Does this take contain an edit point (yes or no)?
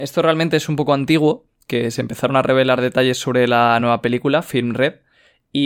no